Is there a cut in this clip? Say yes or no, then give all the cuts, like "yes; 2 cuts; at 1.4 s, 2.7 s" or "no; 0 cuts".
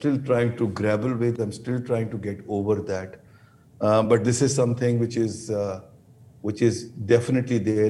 no; 0 cuts